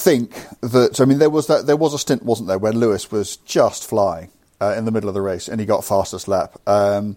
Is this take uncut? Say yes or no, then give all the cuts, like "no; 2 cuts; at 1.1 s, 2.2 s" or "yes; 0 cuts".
yes; 0 cuts